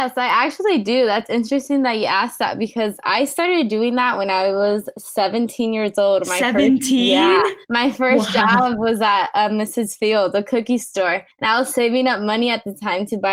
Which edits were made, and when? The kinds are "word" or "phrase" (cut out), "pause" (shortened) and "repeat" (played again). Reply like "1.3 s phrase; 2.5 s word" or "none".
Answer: 7.6 s pause; 11.3 s pause